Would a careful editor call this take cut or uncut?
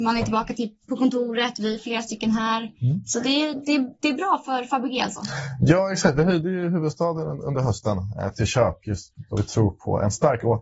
uncut